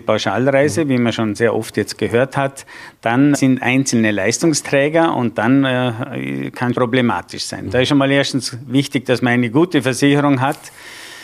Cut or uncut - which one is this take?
cut